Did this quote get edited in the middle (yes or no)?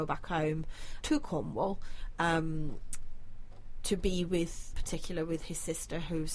yes